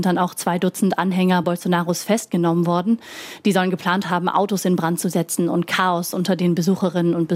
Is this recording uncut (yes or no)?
yes